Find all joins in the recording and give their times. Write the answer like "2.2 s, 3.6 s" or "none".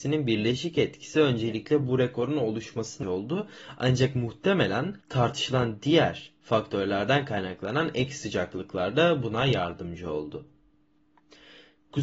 3.0 s, 5.0 s